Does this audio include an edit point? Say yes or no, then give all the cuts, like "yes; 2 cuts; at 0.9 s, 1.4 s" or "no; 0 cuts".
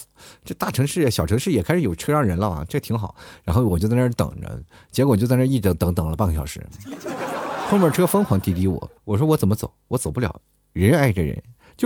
yes; 1 cut; at 9.0 s